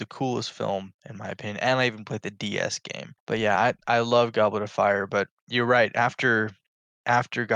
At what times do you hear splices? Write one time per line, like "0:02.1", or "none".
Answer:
none